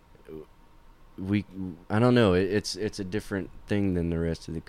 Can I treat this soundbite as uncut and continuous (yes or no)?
no